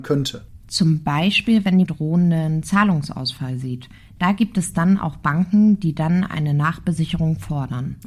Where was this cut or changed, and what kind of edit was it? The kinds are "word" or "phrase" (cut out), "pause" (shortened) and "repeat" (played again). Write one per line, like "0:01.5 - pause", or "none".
0:01.9 - phrase